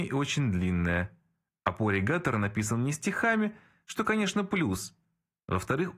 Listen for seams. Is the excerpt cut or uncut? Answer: uncut